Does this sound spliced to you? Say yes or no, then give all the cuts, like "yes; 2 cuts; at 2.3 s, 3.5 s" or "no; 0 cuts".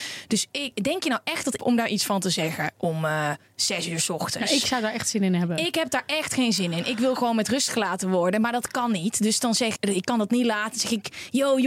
yes; 2 cuts; at 1.6 s, 9.8 s